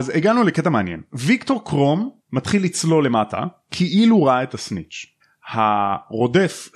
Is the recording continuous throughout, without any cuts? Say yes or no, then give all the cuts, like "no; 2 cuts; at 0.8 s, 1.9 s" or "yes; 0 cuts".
no; 2 cuts; at 2.2 s, 5.2 s